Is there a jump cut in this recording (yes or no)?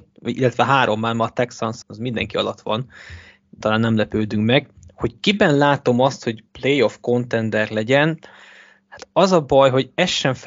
yes